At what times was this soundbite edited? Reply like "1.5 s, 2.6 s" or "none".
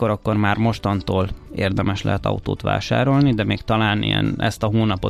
none